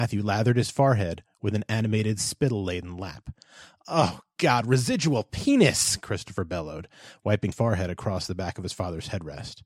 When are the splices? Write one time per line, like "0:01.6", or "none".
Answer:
0:07.5